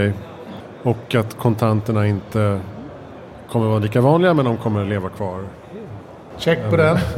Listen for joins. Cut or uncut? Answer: uncut